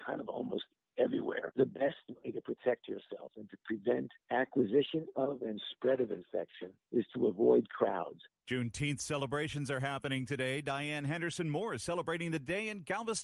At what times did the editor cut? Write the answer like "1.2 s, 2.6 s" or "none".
4.2 s, 6.8 s